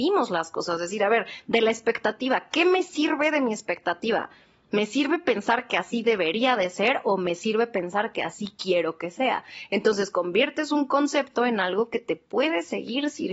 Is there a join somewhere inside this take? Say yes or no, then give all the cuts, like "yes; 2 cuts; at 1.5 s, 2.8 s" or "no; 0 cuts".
no; 0 cuts